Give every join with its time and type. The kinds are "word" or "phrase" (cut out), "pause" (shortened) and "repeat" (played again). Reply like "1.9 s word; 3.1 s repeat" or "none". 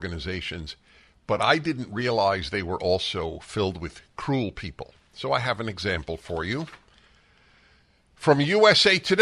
none